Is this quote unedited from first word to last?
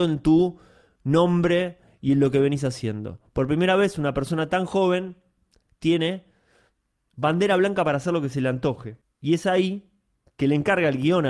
yes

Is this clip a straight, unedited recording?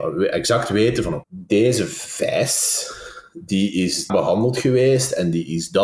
no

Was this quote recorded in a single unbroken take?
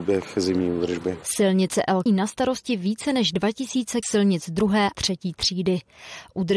no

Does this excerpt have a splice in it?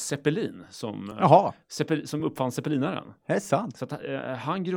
no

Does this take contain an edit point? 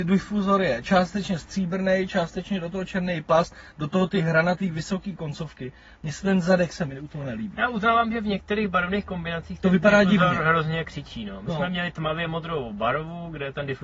no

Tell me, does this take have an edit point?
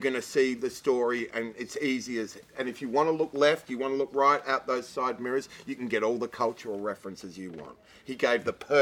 no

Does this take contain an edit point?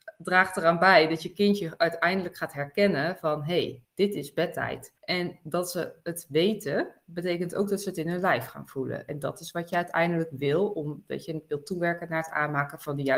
yes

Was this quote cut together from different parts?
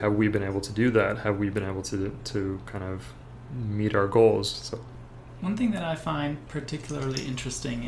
no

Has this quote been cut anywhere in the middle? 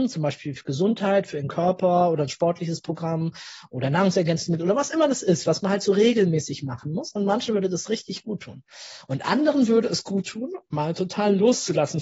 no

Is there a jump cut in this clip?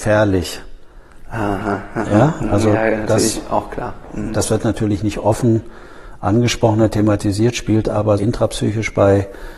yes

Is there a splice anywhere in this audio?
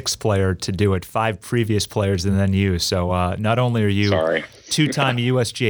no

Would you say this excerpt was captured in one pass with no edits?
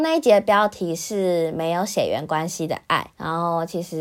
no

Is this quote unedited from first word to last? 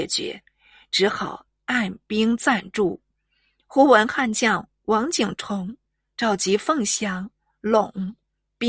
yes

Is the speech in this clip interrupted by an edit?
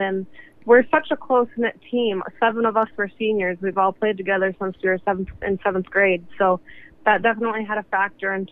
no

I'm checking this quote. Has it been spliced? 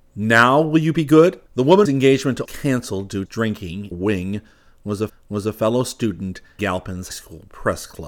yes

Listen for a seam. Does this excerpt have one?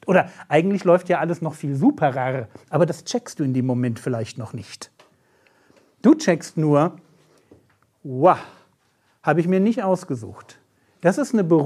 no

